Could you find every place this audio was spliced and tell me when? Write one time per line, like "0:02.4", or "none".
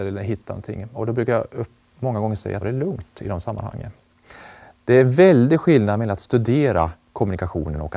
0:02.6